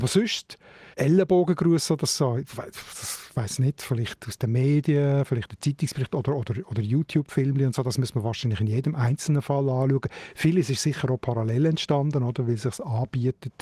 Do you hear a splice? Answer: yes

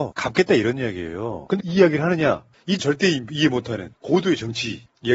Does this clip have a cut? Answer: yes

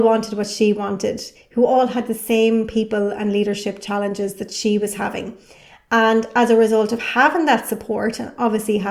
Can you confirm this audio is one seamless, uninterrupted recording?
yes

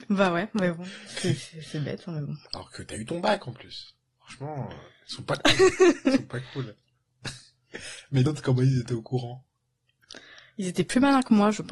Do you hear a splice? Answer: yes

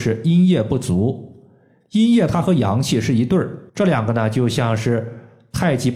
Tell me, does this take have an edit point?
yes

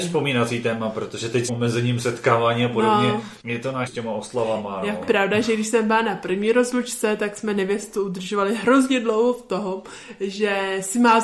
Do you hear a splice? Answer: yes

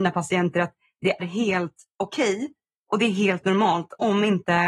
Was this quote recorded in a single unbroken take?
no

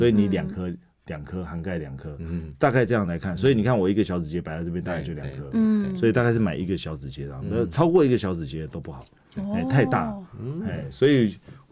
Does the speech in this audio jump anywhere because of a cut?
no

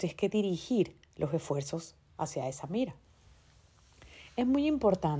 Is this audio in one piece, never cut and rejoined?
yes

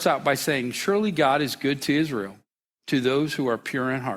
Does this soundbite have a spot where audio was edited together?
no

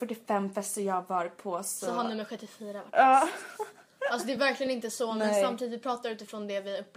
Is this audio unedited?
yes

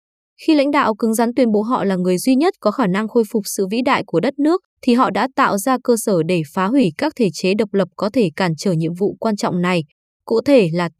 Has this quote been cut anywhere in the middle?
yes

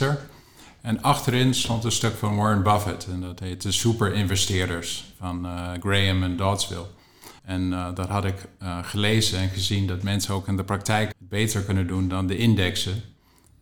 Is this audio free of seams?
no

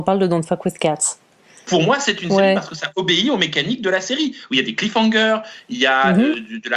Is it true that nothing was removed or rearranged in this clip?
yes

